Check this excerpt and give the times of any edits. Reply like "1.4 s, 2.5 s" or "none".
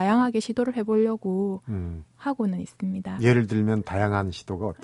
2.1 s